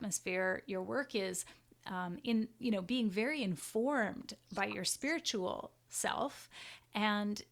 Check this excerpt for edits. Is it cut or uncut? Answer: uncut